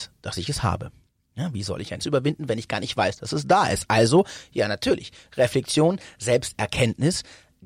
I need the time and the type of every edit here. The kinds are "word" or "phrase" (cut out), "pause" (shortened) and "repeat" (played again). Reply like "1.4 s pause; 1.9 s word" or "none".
2.0 s word